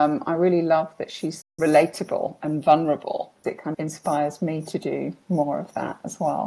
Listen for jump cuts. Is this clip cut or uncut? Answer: cut